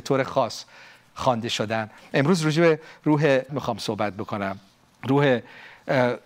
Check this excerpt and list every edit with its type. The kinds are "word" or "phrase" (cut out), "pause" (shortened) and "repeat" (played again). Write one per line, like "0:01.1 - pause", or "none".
0:03.5 - word
0:04.7 - pause